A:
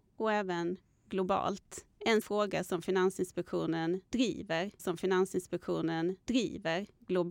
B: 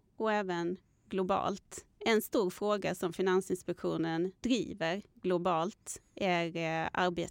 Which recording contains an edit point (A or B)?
A